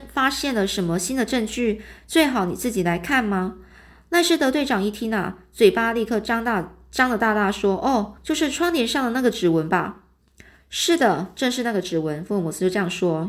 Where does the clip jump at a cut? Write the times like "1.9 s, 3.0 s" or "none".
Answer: 8.2 s